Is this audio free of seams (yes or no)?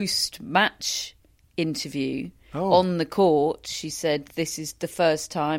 yes